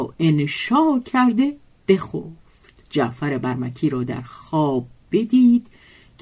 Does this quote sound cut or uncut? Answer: cut